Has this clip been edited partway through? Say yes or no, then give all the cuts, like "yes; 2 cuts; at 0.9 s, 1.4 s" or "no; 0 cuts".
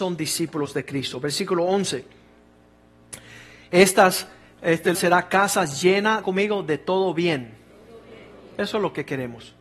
yes; 2 cuts; at 4.9 s, 6.2 s